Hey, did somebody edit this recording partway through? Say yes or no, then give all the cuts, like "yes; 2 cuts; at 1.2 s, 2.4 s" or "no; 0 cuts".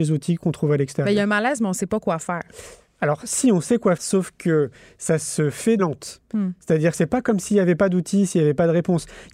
yes; 2 cuts; at 4.0 s, 5.8 s